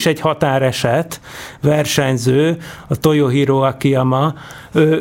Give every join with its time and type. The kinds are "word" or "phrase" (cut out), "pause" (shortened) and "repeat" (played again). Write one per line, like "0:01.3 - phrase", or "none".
none